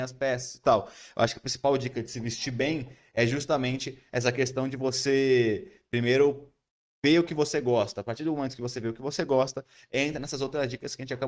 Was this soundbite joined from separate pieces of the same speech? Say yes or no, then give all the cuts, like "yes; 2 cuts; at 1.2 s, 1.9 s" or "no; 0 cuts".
no; 0 cuts